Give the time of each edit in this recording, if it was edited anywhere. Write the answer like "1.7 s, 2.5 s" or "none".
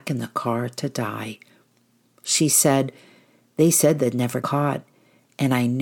4.4 s